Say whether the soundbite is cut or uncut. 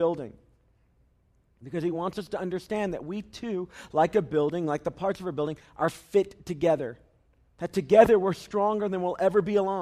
uncut